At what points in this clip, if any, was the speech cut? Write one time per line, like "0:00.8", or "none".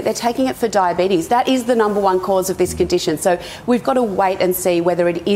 0:03.8